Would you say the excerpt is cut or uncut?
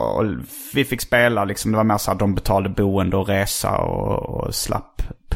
uncut